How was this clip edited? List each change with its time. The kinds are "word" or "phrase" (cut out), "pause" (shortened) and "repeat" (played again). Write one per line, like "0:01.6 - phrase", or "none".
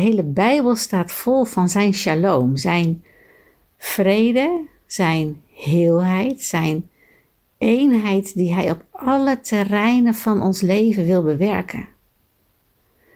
none